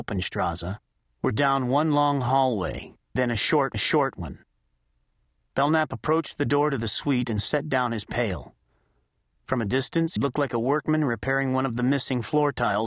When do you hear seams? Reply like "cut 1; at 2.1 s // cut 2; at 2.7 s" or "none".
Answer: cut 1; at 3.2 s // cut 2; at 3.7 s // cut 3; at 10.2 s